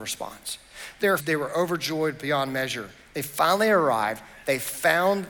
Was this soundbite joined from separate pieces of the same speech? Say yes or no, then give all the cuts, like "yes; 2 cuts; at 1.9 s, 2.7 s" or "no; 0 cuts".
yes; 1 cut; at 1.2 s